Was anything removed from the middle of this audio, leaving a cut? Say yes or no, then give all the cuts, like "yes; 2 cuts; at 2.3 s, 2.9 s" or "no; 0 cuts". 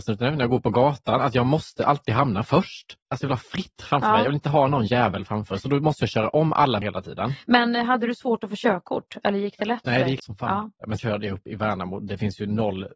yes; 3 cuts; at 6.8 s, 10.2 s, 11.0 s